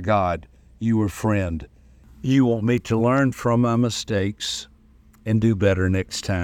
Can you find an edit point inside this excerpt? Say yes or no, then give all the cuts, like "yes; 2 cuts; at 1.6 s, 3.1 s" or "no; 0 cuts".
no; 0 cuts